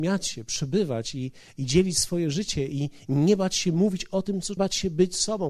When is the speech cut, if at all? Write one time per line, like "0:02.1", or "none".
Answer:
0:04.6